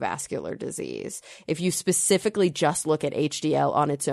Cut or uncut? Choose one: uncut